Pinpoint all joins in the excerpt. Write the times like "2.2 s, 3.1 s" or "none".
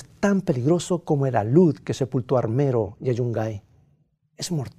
none